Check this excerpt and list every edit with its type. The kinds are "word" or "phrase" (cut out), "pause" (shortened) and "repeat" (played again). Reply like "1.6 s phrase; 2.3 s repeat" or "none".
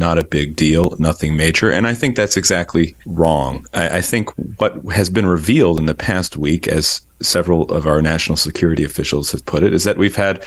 3.0 s pause